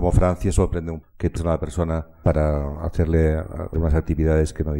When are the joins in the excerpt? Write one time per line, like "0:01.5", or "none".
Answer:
0:01.0
0:01.4
0:02.2
0:03.7